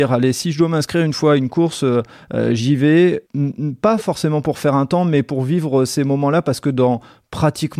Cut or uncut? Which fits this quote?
cut